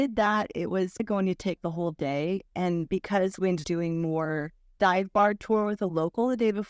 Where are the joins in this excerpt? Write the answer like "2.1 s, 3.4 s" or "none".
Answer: 1.0 s, 1.6 s, 3.6 s

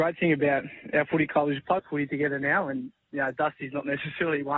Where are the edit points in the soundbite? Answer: 1.8 s

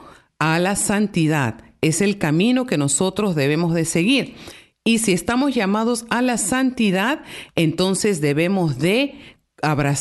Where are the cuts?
none

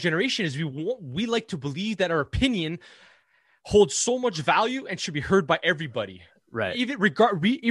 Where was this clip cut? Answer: none

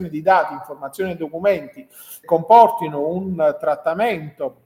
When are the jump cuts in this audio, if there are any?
2.2 s

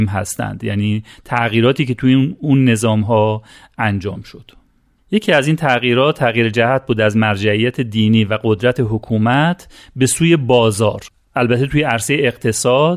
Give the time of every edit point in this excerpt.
none

